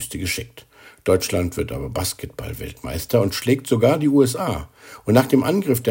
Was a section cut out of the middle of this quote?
no; 0 cuts

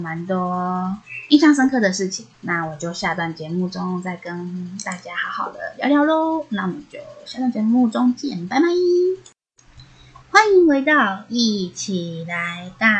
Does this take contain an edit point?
yes; 2 cuts; at 2.3 s, 10.2 s

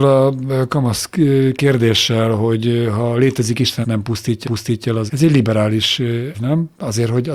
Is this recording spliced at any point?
yes; 4 cuts; at 3.8 s, 4.4 s, 5.1 s, 6.3 s

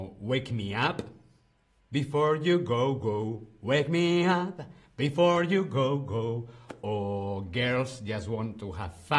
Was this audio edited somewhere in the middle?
no; 0 cuts

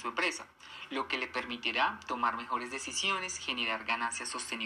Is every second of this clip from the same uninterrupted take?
yes; 0 cuts

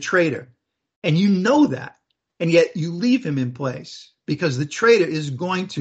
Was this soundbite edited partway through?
no; 0 cuts

